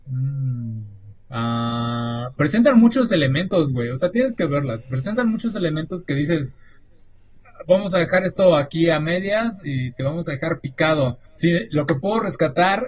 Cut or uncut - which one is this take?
cut